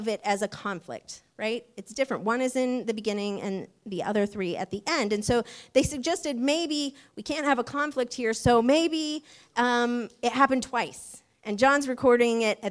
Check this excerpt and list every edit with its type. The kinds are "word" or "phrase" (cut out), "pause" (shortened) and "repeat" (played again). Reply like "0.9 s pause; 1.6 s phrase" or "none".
none